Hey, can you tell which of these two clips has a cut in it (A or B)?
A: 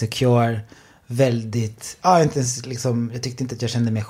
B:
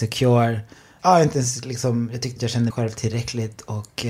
B